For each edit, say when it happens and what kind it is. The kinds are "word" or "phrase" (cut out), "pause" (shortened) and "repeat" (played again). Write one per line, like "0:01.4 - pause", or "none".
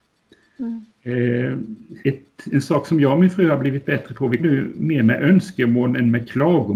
0:02.0 - pause
0:04.4 - word

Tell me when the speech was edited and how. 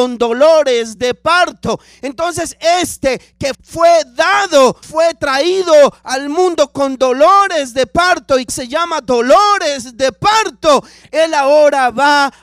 0:03.5 - word
0:04.8 - word
0:08.5 - phrase

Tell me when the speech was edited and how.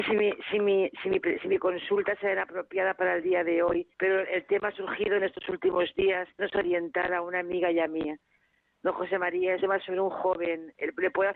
0:03.9 - pause
0:06.4 - phrase
0:09.6 - word

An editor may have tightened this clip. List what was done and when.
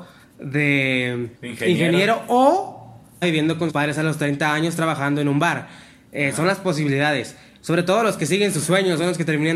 0:01.4 - pause
0:03.2 - word
0:03.7 - word

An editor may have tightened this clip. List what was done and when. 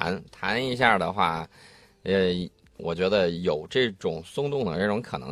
none

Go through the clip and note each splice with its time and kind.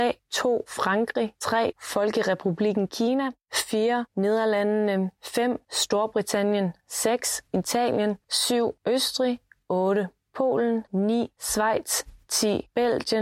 0:07.5 - pause
0:10.9 - pause

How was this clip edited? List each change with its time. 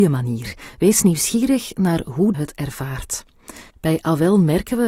0:02.3 - phrase
0:03.7 - pause

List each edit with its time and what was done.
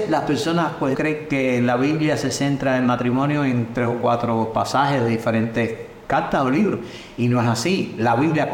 0:00.9 - word

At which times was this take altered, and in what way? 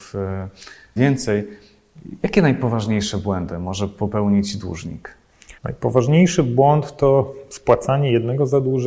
0:01.0 - phrase
0:05.6 - pause

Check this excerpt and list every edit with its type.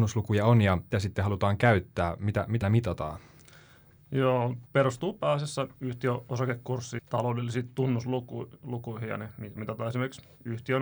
0:00.9 - word
0:02.6 - word
0:04.7 - word
0:07.0 - word
0:09.6 - word

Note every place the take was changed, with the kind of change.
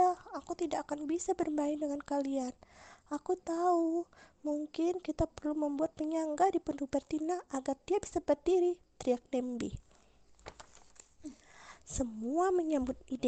none

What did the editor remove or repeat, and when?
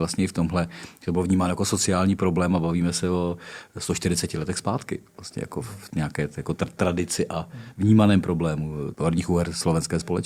0:08.9 - word

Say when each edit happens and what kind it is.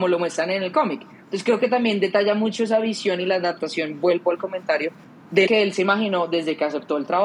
0:05.5 - word

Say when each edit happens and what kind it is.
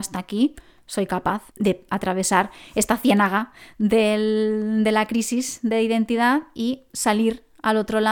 0:01.5 - pause
0:06.9 - pause

